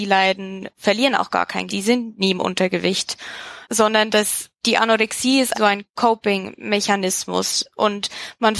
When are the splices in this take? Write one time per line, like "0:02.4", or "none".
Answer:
0:01.7
0:03.6
0:04.5
0:05.5